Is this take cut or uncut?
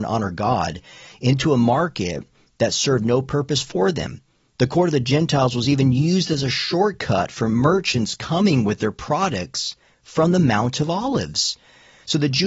uncut